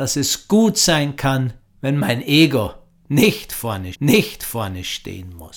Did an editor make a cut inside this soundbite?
yes; 2 cuts; at 1.6 s, 3.9 s

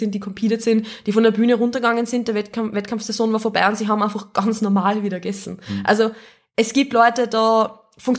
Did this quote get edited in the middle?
no; 0 cuts

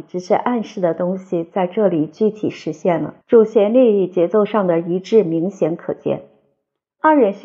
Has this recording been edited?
yes; 1 cut; at 3.2 s

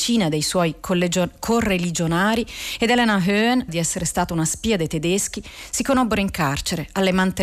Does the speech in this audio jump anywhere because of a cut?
yes; 1 cut; at 3.7 s

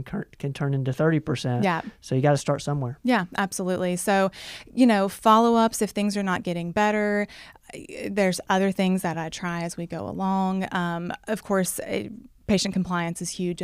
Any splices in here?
no; 0 cuts

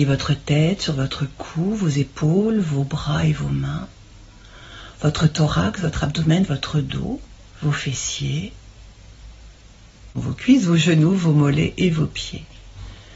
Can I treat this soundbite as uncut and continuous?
no; 1 cut; at 7.5 s

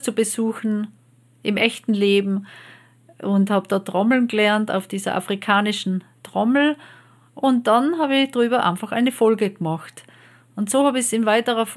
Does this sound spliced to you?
no; 0 cuts

